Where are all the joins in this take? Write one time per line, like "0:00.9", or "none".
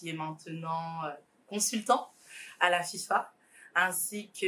none